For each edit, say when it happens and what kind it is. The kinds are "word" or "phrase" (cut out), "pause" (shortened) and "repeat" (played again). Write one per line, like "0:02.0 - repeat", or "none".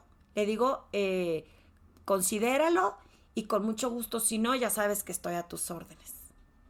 none